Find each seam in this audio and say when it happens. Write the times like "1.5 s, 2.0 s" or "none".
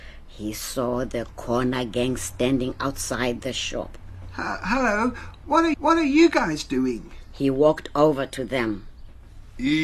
5.7 s